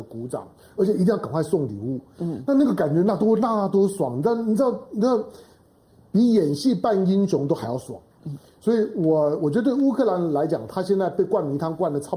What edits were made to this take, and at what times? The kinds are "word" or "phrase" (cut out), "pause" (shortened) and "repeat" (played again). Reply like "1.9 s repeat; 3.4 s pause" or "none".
none